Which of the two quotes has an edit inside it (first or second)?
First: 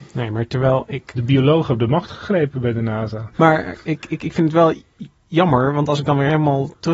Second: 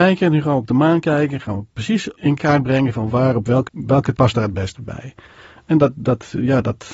second